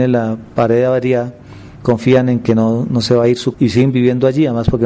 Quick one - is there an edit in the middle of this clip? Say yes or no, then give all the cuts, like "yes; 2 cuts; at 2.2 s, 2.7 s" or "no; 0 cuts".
yes; 2 cuts; at 1.7 s, 3.5 s